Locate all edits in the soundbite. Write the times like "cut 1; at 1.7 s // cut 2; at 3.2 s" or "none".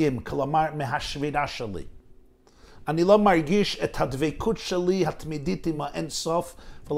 none

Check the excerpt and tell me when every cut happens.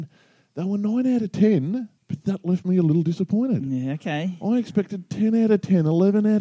cut 1; at 2.0 s

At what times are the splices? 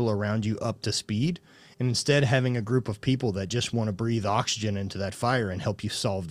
none

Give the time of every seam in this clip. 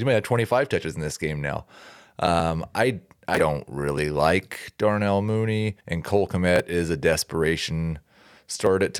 cut 1; at 5.8 s

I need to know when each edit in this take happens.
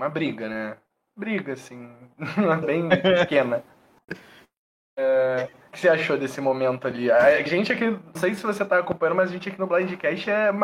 cut 1; at 2.6 s // cut 2; at 5.7 s // cut 3; at 7.5 s // cut 4; at 8.1 s

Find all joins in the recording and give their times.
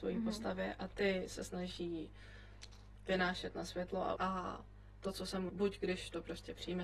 cut 1; at 4.2 s // cut 2; at 5.5 s

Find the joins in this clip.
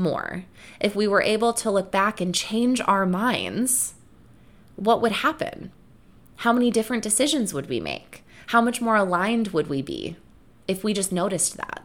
none

